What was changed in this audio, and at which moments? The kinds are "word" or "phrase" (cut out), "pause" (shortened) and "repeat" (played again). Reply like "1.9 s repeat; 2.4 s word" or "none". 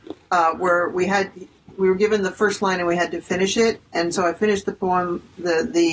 none